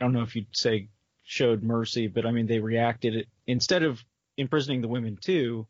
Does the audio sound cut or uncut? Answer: uncut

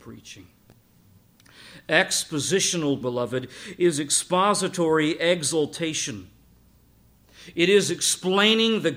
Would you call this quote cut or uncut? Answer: cut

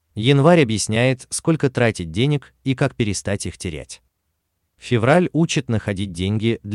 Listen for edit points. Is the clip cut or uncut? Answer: uncut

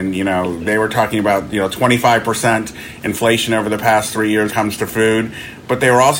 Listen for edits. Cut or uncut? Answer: cut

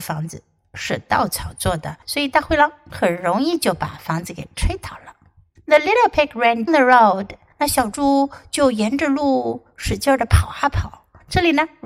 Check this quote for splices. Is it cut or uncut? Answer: cut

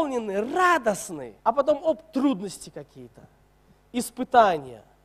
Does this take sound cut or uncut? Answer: cut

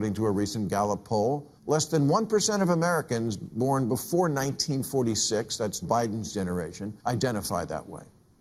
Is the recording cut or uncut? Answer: cut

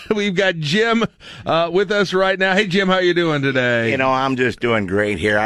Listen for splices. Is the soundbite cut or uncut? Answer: uncut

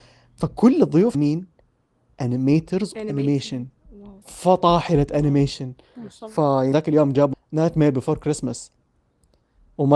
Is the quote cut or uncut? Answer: cut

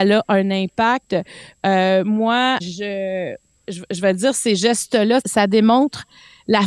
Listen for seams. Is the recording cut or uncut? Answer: cut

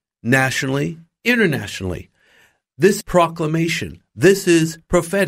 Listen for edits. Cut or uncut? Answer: cut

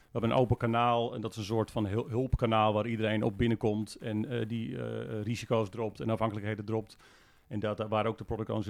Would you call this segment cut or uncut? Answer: uncut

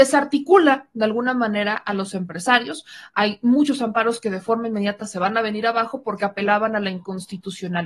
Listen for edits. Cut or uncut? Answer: uncut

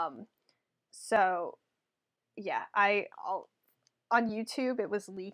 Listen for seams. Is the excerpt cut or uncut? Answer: uncut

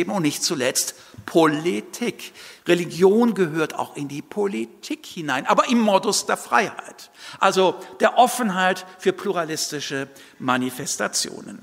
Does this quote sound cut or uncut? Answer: uncut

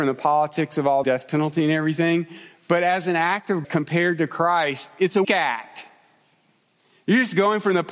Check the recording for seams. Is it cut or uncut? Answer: cut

